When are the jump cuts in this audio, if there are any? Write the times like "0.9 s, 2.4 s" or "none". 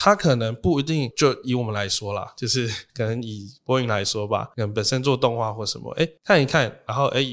6.2 s